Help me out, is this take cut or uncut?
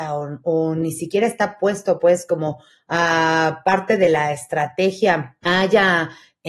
cut